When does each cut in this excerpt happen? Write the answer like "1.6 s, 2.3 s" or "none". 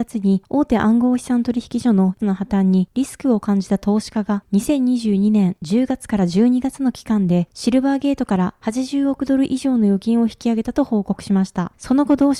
2.2 s